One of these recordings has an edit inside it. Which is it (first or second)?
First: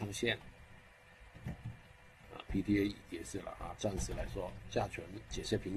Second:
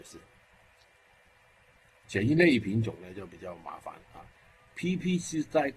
first